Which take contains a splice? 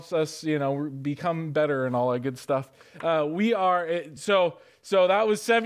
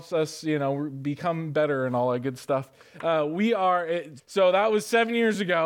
second; 1 cut; at 4.2 s

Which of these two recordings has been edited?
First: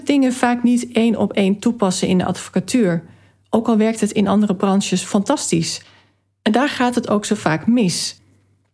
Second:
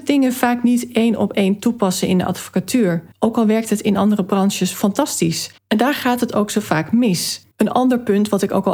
second; 3 cuts; at 3.1 s, 5.6 s, 7.5 s

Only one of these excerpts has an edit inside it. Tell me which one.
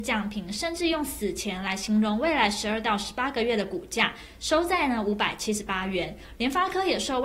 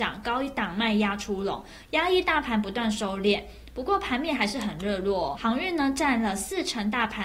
second; 1 cut; at 5.3 s

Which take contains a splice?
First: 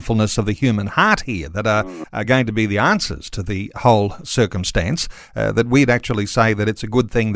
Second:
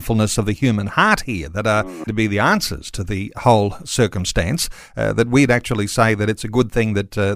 second; 1 cut; at 2.1 s

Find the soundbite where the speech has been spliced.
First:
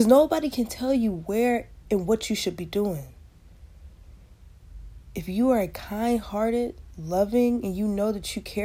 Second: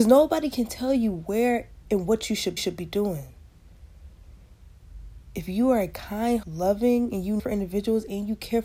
second; 3 cuts; at 2.6 s, 6.4 s, 7.4 s

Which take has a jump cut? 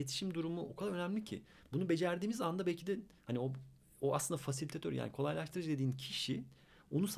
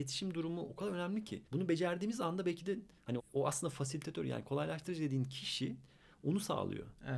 second; 2 cuts; at 1.5 s, 3.2 s

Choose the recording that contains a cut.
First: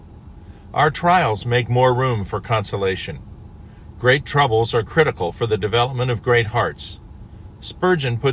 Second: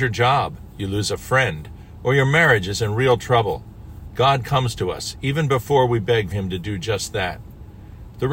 second; 1 cut; at 6.3 s

